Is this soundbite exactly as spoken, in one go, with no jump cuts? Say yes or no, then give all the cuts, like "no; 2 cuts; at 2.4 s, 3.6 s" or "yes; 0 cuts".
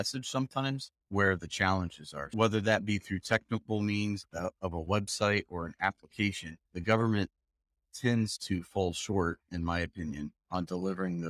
no; 2 cuts; at 1.0 s, 6.7 s